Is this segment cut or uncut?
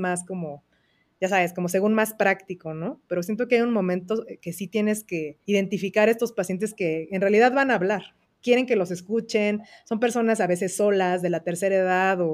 cut